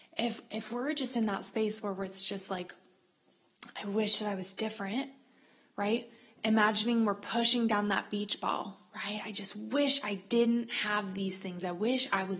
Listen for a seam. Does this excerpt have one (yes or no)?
no